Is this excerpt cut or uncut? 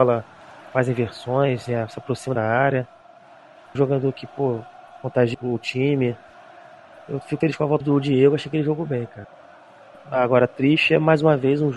cut